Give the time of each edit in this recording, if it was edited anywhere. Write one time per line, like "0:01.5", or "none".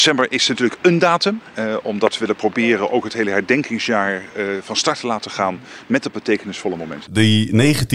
none